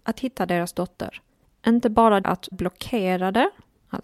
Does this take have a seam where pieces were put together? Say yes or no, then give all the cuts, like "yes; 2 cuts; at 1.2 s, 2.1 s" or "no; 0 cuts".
yes; 2 cuts; at 2.2 s, 2.5 s